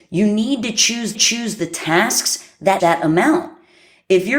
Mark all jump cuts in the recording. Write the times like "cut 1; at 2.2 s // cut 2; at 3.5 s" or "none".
cut 1; at 1.1 s // cut 2; at 2.8 s